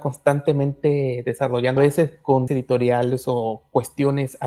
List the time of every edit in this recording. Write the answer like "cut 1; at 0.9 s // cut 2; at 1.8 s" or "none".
cut 1; at 1.8 s // cut 2; at 2.5 s